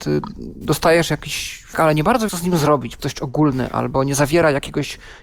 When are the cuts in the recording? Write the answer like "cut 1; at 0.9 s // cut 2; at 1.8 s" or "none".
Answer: cut 1; at 1.7 s // cut 2; at 2.3 s // cut 3; at 3.0 s